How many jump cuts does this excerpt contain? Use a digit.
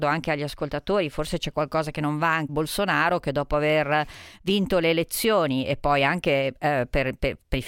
1